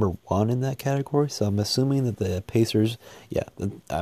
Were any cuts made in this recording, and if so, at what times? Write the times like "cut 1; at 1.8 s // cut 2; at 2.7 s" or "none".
none